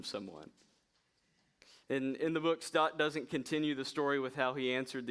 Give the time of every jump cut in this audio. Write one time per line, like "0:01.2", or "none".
none